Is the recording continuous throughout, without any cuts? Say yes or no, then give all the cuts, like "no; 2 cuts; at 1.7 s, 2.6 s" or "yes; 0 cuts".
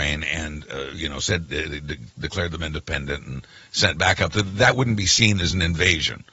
yes; 0 cuts